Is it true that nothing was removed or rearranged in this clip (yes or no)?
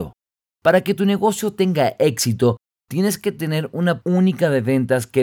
no